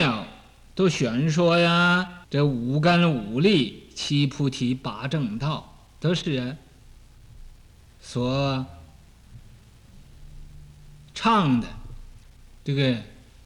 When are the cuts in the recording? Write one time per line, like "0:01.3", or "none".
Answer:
0:02.2
0:07.7